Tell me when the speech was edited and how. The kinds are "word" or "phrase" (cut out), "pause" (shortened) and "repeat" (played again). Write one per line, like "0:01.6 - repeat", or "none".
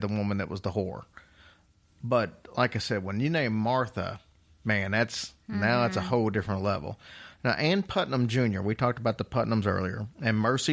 none